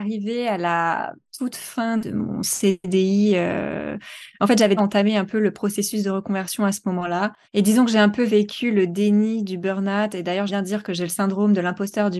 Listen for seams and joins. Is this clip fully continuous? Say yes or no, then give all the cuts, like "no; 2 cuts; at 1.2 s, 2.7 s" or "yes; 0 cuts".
no; 3 cuts; at 4.8 s, 7.4 s, 10.5 s